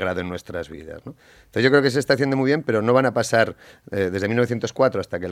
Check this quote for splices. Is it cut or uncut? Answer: uncut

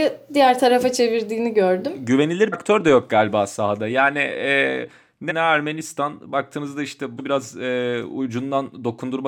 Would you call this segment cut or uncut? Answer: cut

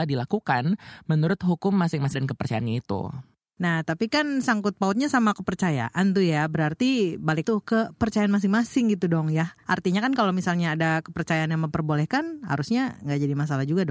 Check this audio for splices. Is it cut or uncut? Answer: cut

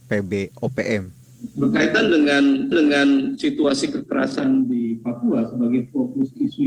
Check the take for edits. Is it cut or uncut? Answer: cut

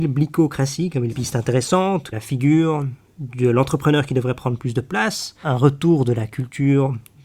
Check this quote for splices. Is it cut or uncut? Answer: cut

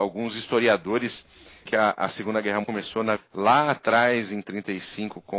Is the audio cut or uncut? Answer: cut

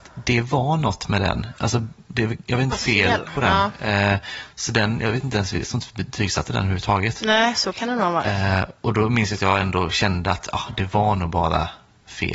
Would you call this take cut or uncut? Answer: cut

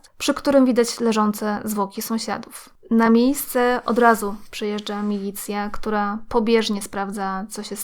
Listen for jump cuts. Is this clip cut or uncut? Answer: uncut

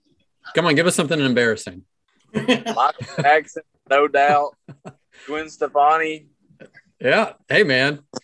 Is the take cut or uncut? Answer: uncut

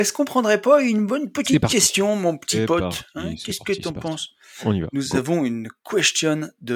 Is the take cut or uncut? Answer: uncut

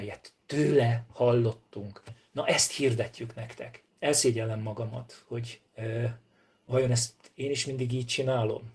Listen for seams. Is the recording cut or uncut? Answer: cut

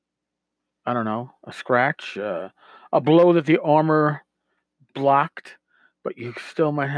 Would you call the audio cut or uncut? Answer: uncut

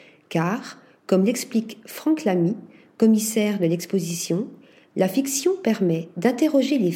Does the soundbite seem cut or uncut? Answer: uncut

